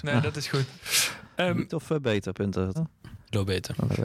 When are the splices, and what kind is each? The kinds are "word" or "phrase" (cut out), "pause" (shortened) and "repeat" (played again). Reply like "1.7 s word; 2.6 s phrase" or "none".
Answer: 1.7 s word; 2.7 s word